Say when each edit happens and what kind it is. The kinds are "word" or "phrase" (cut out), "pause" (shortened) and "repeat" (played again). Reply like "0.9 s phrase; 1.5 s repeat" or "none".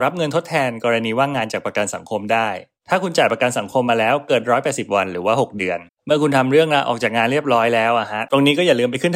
5.9 s pause